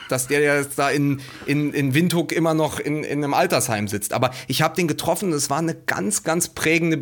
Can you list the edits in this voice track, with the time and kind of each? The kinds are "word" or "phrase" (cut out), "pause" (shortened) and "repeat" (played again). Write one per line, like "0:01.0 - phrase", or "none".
none